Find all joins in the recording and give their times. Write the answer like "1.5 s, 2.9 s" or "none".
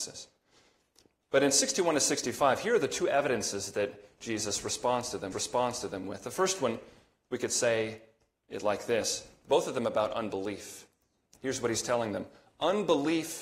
5.3 s